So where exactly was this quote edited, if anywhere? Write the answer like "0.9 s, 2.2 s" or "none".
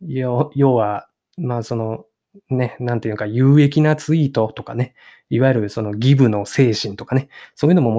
none